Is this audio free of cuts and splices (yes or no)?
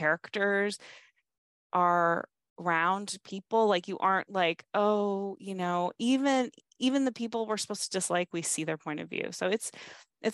yes